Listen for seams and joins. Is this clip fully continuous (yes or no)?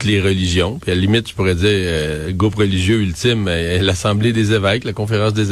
yes